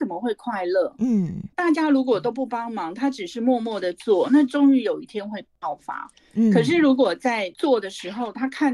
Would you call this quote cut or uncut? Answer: cut